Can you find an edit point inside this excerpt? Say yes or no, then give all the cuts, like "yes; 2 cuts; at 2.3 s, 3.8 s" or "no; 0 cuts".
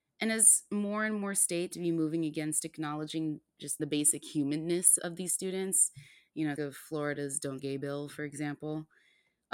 yes; 5 cuts; at 1.7 s, 3.8 s, 5.0 s, 6.6 s, 7.6 s